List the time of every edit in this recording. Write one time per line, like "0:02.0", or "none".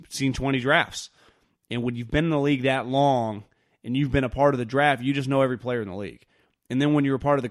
none